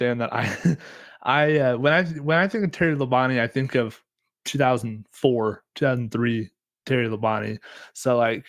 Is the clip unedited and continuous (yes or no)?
yes